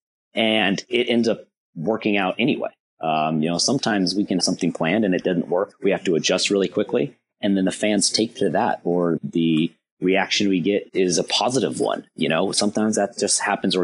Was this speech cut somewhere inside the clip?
yes; 4 cuts; at 4.4 s, 5.7 s, 9.2 s, 10.9 s

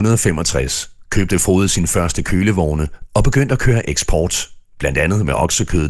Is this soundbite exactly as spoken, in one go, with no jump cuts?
yes; 0 cuts

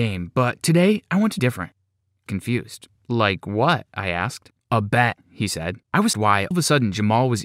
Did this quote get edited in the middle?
yes; 7 cuts; at 1.4 s, 2.3 s, 3.0 s, 4.6 s, 5.8 s, 6.1 s, 6.5 s

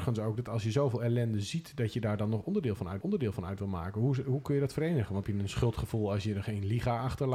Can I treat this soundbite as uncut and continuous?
no; 2 cuts; at 3.0 s, 5.2 s

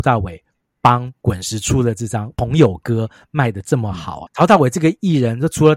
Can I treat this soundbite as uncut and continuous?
no; 1 cut; at 4.3 s

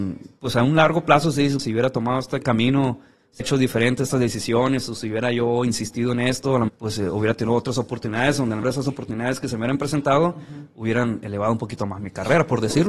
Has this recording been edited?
yes; 5 cuts; at 1.6 s, 2.4 s, 3.4 s, 6.7 s, 8.6 s

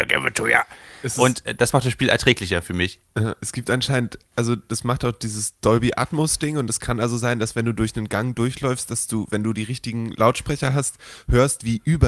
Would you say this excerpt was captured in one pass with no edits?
yes; 0 cuts

